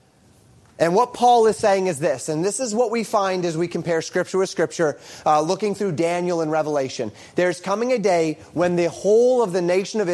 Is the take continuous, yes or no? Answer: yes